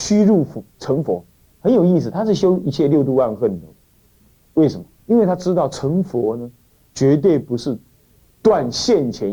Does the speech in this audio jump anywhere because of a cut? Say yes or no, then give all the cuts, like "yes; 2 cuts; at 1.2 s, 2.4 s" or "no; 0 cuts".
yes; 2 cuts; at 1.3 s, 5.0 s